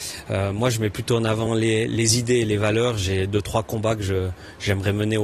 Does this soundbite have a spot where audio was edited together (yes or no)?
no